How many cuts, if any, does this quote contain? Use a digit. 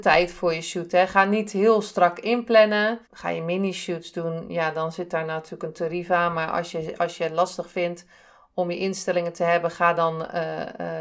1